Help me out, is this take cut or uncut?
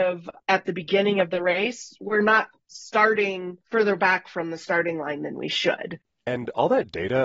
cut